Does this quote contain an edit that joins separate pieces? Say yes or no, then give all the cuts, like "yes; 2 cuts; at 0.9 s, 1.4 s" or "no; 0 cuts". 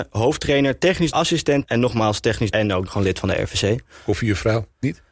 yes; 4 cuts; at 1.1 s, 1.6 s, 2.5 s, 2.9 s